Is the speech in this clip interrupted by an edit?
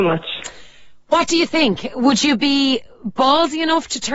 no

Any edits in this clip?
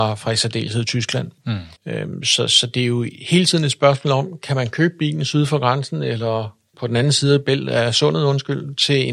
yes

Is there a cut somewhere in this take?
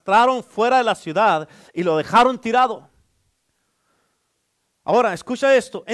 no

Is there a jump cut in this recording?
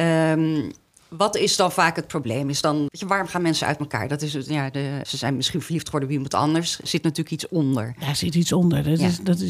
yes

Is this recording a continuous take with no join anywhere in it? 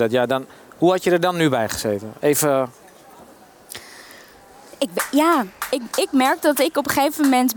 yes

